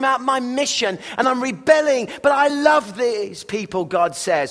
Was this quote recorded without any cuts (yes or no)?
yes